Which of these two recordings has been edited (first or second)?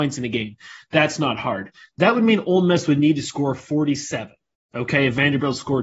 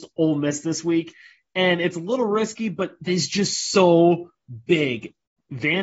second